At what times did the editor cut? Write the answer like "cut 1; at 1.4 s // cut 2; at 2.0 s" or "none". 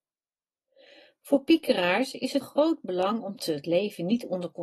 cut 1; at 2.4 s // cut 2; at 3.4 s